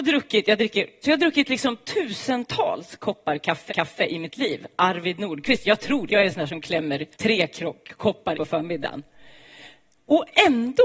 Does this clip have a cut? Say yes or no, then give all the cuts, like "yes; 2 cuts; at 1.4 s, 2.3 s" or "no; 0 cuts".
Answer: yes; 5 cuts; at 1.0 s, 3.7 s, 6.1 s, 7.1 s, 8.3 s